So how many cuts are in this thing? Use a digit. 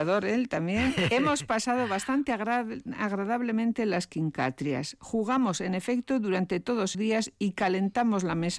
1